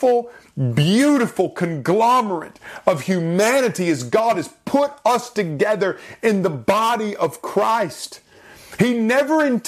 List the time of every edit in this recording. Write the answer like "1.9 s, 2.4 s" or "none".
none

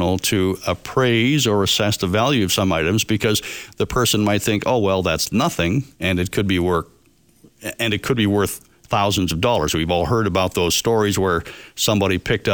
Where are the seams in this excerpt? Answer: 5.9 s

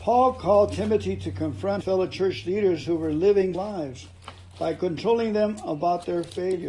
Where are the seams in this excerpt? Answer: 1.8 s, 3.5 s

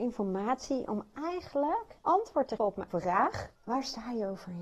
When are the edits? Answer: 2.0 s, 2.6 s, 2.9 s, 3.6 s

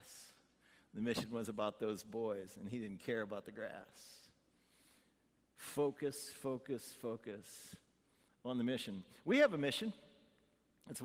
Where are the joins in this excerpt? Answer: none

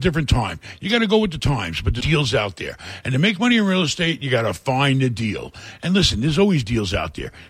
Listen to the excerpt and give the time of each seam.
2.0 s

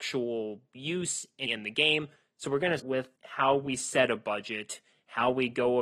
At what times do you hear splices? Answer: 1.5 s, 2.2 s, 2.8 s, 3.2 s

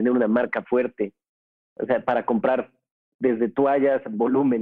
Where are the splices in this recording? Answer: none

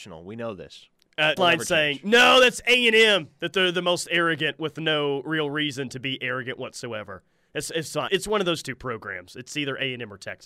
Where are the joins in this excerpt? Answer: 1.4 s, 8.1 s

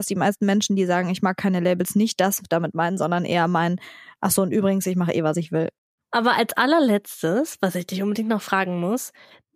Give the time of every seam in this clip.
none

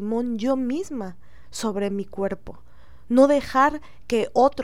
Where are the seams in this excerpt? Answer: none

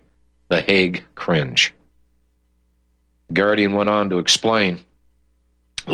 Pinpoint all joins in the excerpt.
none

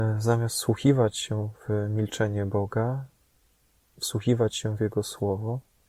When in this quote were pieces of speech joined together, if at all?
none

